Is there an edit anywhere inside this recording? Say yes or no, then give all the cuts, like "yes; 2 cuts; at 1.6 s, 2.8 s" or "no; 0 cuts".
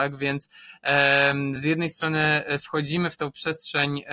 no; 0 cuts